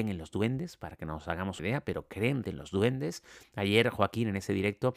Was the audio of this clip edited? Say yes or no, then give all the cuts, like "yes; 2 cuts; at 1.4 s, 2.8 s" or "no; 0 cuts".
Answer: yes; 2 cuts; at 1.6 s, 2.4 s